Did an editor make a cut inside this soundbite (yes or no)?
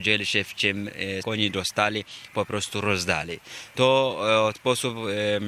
yes